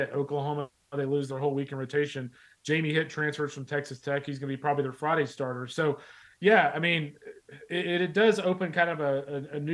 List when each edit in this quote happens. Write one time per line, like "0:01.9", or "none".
none